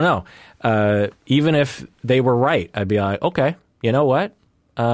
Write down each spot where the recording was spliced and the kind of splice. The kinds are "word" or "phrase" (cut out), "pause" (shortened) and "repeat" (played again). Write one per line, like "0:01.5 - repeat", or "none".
none